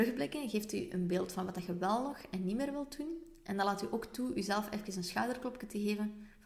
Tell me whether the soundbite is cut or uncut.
uncut